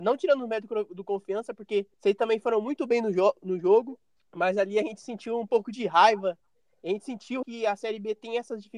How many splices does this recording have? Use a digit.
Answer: 3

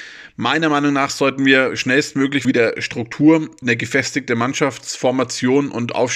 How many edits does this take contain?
2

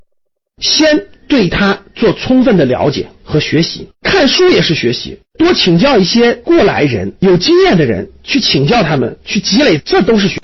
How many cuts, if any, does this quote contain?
3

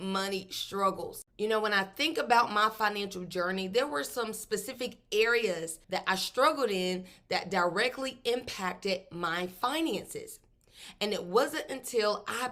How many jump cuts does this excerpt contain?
2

